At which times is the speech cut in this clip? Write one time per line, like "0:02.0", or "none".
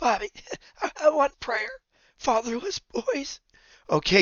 0:01.0
0:01.3